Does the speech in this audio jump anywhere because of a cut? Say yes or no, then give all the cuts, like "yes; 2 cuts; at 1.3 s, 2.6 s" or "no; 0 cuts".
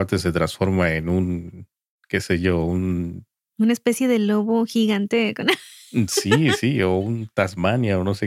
no; 0 cuts